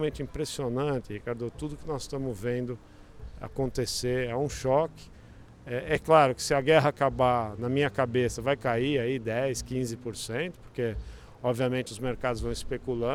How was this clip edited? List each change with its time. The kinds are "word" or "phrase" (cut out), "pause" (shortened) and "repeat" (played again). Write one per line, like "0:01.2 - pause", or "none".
none